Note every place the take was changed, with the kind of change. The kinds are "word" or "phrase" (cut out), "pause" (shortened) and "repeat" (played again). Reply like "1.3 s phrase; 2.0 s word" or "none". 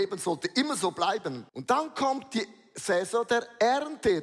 1.5 s pause